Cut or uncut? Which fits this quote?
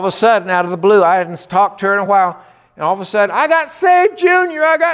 uncut